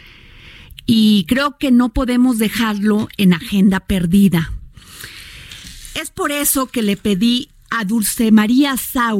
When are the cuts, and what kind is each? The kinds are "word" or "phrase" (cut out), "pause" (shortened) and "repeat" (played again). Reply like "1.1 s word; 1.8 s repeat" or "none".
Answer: none